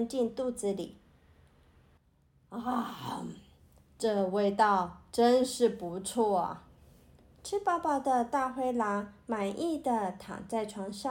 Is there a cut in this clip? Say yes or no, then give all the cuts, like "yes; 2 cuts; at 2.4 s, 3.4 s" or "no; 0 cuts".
no; 0 cuts